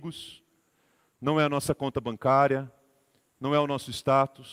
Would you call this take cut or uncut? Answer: uncut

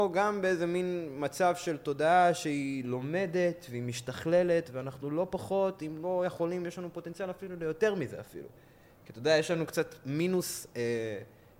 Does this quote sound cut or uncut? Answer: uncut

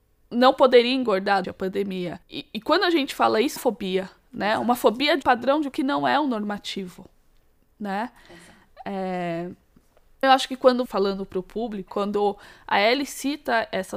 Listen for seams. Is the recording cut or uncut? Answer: cut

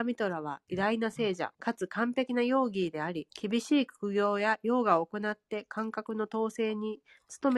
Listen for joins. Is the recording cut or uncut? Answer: cut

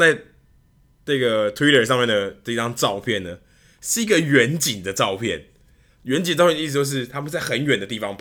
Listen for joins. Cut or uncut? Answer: uncut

